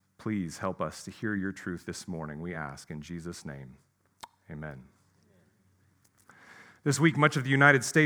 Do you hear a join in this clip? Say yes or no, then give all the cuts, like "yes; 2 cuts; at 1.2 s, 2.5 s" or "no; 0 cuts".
no; 0 cuts